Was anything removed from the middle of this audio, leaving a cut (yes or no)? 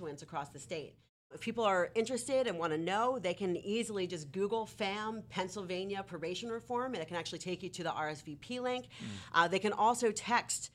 no